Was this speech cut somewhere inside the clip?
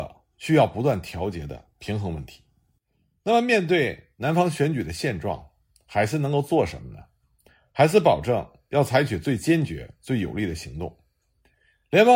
no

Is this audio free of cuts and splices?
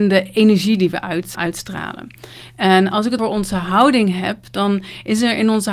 no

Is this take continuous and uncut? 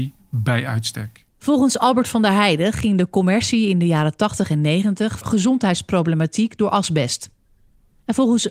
no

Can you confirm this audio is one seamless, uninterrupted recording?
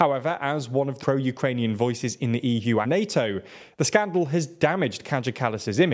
no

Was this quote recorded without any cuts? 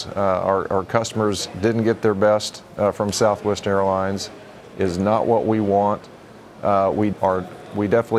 no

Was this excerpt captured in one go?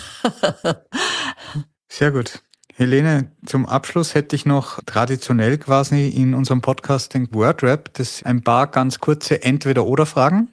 no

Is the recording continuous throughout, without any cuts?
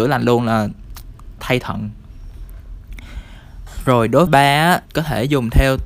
no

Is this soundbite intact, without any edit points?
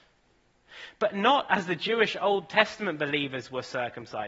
yes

